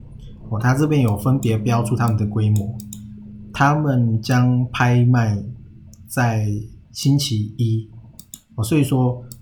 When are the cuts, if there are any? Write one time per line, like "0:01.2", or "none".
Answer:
0:06.8